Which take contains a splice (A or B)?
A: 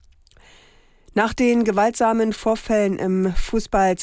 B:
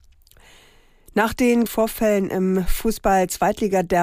B